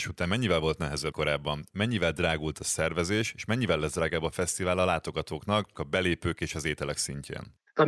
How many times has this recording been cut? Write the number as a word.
two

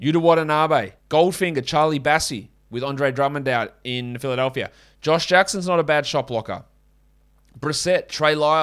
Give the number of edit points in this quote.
one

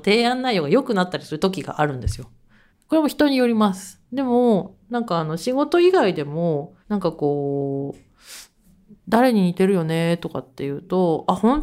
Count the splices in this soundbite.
three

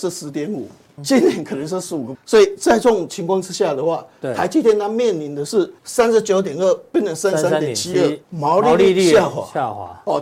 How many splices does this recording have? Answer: four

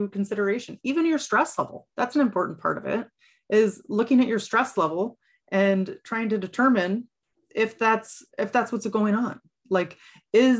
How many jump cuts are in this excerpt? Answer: two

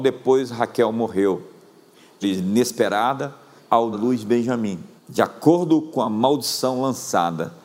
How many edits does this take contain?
four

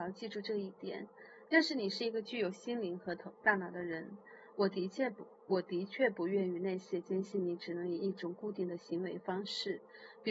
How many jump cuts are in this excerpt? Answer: zero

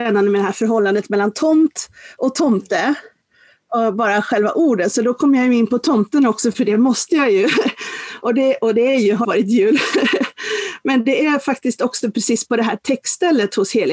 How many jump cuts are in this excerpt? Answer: one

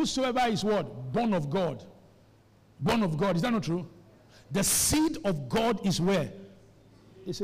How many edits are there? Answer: zero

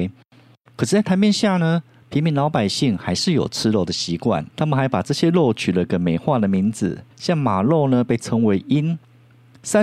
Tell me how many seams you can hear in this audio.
two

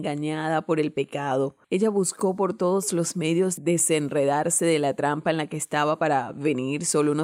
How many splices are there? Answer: one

